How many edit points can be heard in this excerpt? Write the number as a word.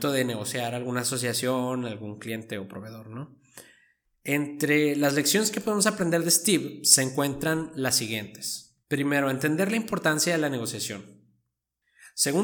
one